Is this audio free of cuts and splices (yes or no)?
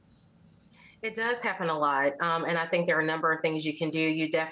yes